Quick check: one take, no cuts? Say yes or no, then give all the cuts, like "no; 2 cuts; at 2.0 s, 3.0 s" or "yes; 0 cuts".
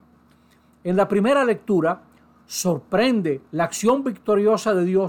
no; 1 cut; at 3.5 s